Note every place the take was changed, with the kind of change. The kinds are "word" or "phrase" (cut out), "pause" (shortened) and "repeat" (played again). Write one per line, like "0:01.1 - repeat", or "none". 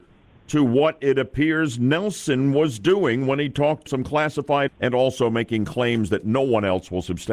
0:03.9 - phrase
0:04.7 - word